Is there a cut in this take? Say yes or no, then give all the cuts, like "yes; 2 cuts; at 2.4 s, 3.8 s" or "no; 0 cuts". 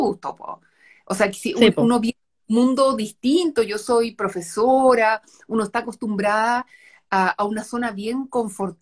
no; 0 cuts